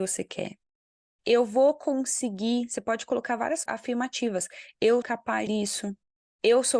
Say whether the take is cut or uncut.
cut